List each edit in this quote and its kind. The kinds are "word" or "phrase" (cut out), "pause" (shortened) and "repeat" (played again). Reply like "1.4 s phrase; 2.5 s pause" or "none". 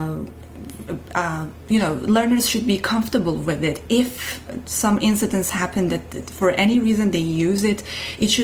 none